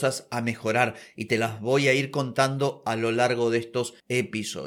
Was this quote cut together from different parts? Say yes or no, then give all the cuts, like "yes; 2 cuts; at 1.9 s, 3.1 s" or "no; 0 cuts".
no; 0 cuts